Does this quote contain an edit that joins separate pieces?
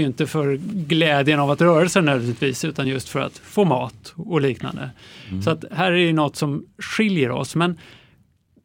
no; 0 cuts

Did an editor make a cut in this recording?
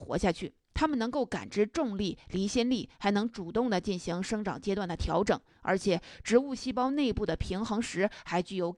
no; 0 cuts

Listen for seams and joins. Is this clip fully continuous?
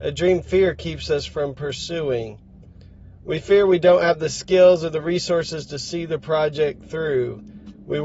yes; 0 cuts

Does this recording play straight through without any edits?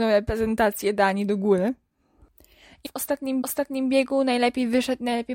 no; 2 cuts; at 2.8 s, 3.4 s

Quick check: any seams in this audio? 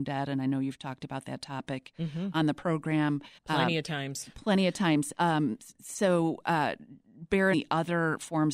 yes; 2 cuts; at 3.4 s, 7.5 s

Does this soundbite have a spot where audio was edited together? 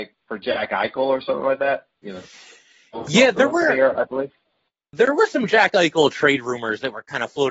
no; 0 cuts

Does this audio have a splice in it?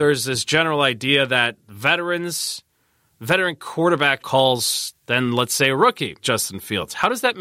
yes; 2 cuts; at 4.2 s, 6.2 s

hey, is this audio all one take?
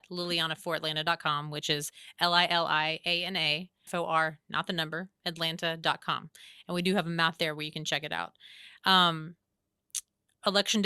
no; 1 cut; at 3.9 s

